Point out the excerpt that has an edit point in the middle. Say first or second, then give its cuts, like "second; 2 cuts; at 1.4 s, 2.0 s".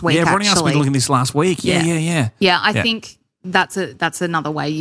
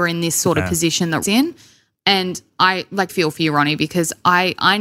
second; 2 cuts; at 1.2 s, 3.1 s